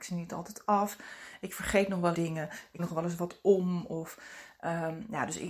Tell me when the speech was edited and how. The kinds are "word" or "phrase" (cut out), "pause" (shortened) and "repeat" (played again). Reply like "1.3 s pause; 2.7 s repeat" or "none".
2.1 s word; 2.8 s word